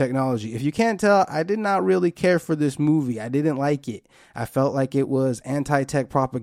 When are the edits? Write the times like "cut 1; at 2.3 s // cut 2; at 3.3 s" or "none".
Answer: none